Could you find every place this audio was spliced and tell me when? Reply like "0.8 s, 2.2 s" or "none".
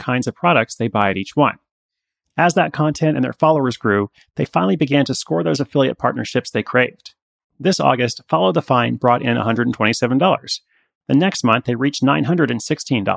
none